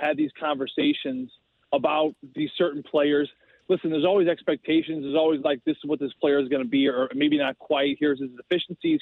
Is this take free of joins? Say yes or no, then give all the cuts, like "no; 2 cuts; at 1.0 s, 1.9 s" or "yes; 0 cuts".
yes; 0 cuts